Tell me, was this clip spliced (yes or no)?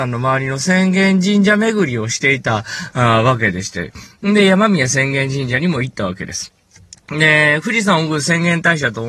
no